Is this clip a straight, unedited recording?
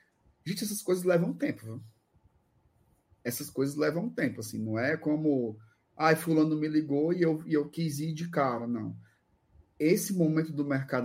yes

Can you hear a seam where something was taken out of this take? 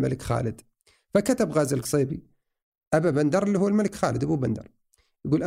no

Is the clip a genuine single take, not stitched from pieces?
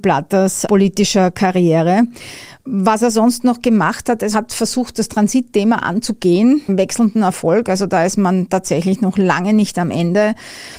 no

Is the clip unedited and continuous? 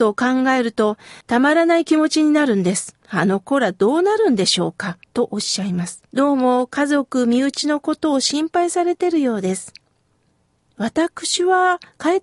no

